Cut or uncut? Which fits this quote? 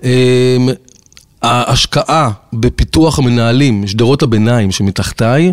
uncut